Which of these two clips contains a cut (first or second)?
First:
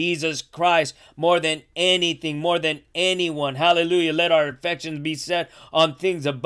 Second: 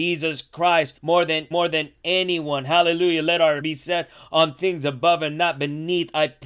second